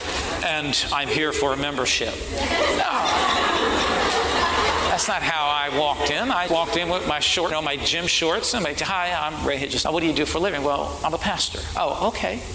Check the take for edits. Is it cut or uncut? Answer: cut